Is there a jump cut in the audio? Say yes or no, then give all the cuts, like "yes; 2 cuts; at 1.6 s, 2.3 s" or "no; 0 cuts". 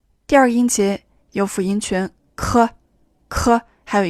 no; 0 cuts